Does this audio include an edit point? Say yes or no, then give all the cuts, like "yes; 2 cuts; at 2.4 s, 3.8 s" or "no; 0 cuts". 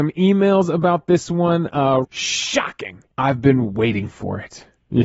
yes; 2 cuts; at 2.0 s, 3.1 s